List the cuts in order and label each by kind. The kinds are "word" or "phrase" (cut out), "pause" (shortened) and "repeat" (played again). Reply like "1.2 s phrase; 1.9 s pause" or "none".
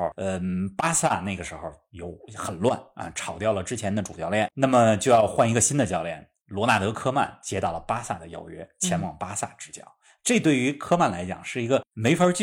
4.5 s word